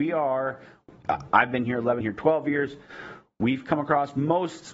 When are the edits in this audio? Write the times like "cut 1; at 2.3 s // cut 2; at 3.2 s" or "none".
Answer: cut 1; at 2.0 s